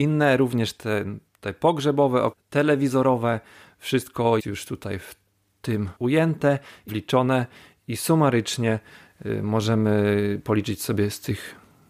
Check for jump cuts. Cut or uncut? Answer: cut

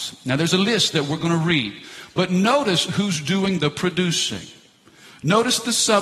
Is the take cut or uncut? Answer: uncut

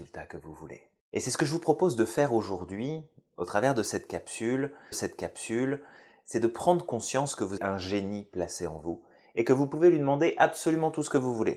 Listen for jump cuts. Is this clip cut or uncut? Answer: cut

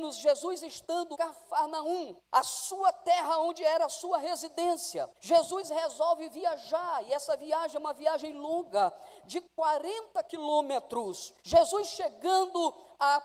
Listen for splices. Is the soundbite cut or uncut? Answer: cut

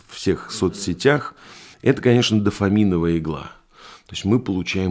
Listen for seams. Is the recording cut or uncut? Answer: cut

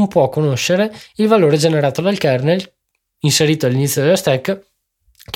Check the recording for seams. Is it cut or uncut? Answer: uncut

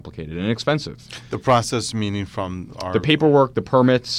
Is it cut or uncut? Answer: uncut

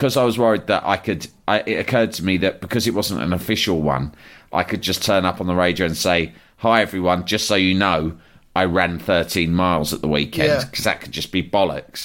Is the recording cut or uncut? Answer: uncut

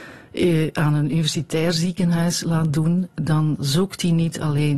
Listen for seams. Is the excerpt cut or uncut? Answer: uncut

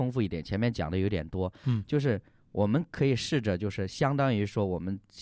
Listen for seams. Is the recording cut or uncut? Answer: uncut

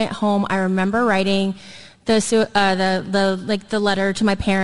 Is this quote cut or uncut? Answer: uncut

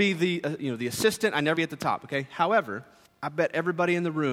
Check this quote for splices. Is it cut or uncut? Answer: cut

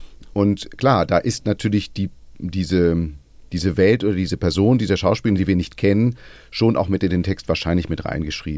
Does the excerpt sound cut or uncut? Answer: cut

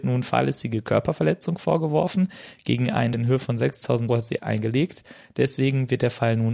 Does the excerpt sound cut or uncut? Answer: cut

